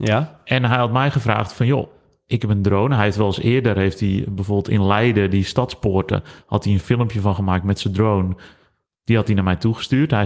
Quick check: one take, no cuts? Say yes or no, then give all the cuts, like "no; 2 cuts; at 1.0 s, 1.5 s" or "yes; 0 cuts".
yes; 0 cuts